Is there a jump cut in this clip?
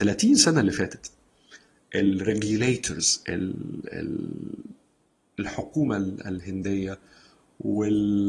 no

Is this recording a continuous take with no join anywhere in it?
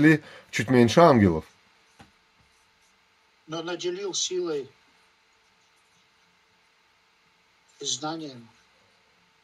yes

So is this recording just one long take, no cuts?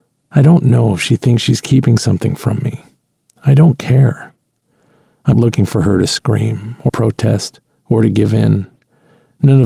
no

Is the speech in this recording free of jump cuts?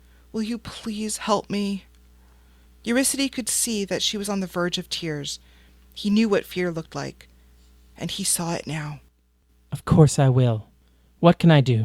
yes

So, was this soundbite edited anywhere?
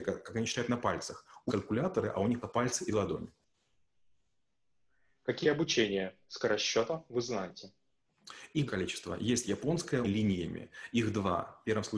yes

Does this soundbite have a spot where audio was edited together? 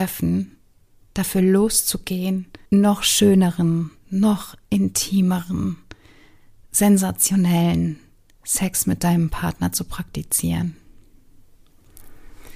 yes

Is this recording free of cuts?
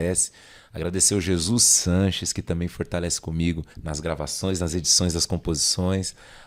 no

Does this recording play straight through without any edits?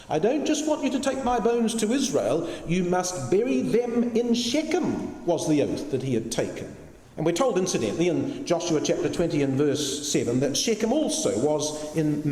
no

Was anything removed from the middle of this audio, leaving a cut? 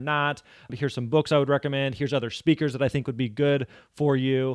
no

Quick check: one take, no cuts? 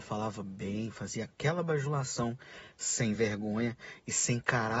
yes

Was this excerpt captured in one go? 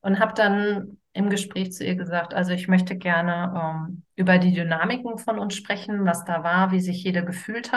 yes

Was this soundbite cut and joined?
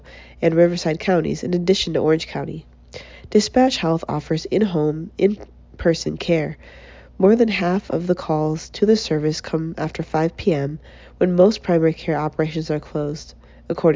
no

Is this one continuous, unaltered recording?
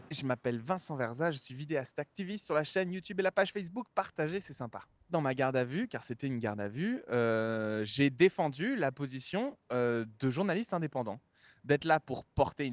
yes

